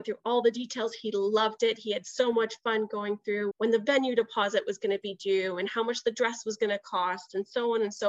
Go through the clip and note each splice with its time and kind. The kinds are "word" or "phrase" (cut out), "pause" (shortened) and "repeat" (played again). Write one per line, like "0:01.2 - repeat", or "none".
0:03.5 - word